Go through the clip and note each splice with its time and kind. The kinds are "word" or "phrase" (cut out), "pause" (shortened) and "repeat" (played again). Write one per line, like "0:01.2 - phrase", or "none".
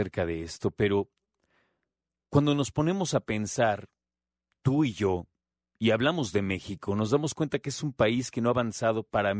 none